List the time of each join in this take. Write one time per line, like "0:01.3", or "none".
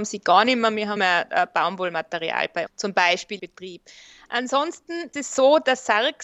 0:01.0
0:02.7
0:03.4
0:05.1